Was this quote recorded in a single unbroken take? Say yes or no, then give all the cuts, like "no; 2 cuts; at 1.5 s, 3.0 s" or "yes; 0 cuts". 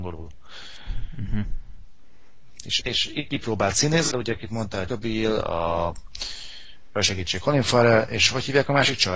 no; 4 cuts; at 2.8 s, 3.3 s, 4.1 s, 4.9 s